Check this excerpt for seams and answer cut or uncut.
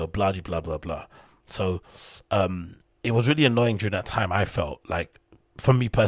uncut